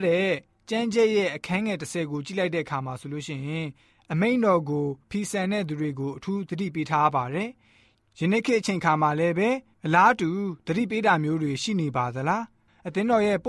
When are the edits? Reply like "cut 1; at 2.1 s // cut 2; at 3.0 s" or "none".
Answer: cut 1; at 5.0 s

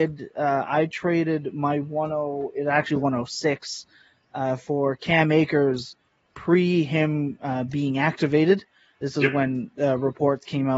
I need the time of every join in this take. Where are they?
none

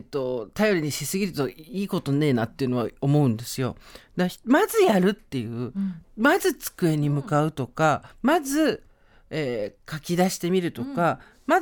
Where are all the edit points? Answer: cut 1; at 8.1 s

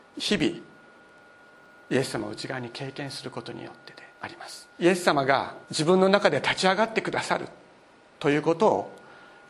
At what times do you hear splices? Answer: cut 1; at 1.2 s // cut 2; at 4.1 s // cut 3; at 4.7 s // cut 4; at 5.6 s

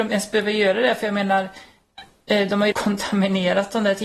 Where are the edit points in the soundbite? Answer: cut 1; at 2.7 s

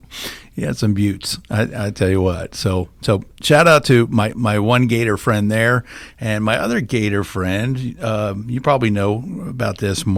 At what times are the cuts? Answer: none

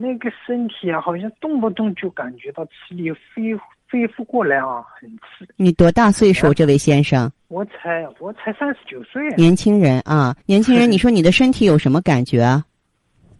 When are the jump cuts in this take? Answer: cut 1; at 7.4 s // cut 2; at 10.4 s

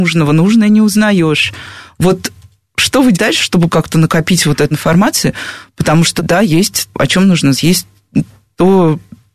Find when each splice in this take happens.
cut 1; at 3.1 s // cut 2; at 3.7 s // cut 3; at 4.7 s // cut 4; at 6.2 s // cut 5; at 6.9 s // cut 6; at 7.5 s

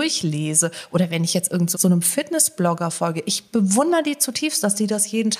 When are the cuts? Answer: cut 1; at 1.7 s

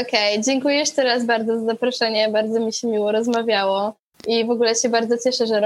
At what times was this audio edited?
none

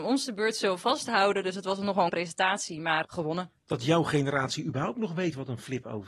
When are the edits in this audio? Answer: cut 1; at 2.1 s // cut 2; at 3.0 s

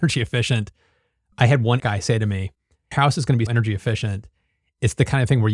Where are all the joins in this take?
cut 1; at 1.8 s // cut 2; at 2.9 s // cut 3; at 3.5 s

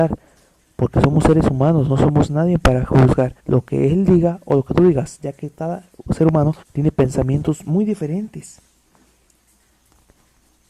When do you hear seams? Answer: cut 1; at 3.4 s // cut 2; at 6.6 s

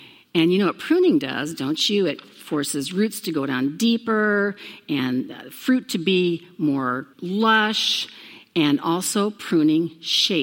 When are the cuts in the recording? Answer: cut 1; at 7.1 s

